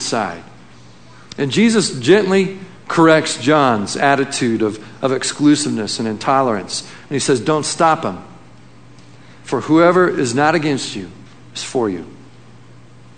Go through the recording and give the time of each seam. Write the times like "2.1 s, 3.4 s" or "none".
none